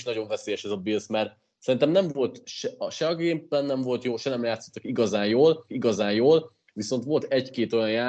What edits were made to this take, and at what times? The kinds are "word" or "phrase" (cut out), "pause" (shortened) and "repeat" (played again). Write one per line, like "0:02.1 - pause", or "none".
0:05.7 - repeat